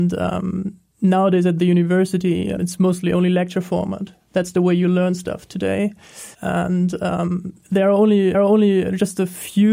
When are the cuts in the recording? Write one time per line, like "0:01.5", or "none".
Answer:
0:02.6
0:04.2
0:06.3
0:08.3